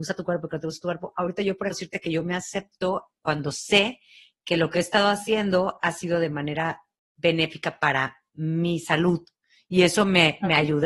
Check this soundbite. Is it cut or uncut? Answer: cut